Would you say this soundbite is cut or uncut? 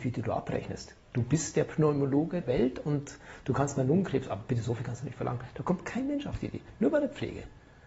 cut